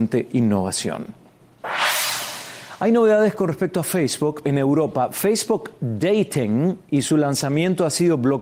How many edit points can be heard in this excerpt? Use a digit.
1